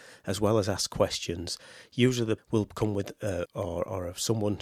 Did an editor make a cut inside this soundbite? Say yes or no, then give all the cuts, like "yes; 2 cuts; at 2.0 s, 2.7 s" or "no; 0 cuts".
yes; 2 cuts; at 2.4 s, 3.5 s